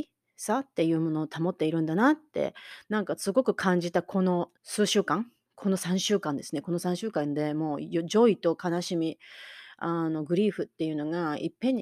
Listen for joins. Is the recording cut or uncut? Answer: cut